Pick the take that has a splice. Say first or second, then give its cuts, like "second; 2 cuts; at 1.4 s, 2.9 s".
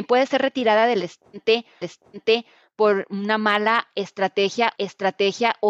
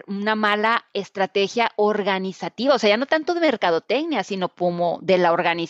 first; 2 cuts; at 1.8 s, 4.8 s